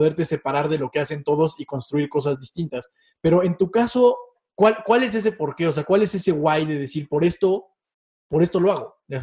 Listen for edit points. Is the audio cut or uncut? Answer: uncut